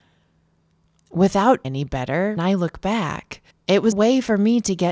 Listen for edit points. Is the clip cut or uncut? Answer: cut